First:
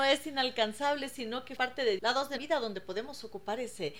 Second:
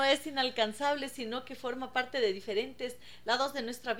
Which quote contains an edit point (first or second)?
first